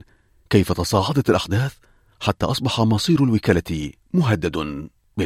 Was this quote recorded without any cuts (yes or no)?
yes